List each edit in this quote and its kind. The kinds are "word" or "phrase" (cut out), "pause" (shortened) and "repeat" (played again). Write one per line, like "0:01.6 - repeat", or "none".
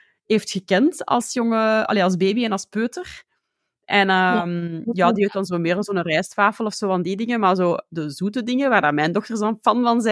none